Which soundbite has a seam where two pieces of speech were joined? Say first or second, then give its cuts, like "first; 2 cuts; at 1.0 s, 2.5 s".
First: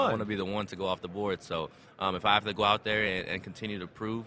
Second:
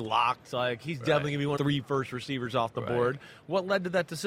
second; 1 cut; at 1.6 s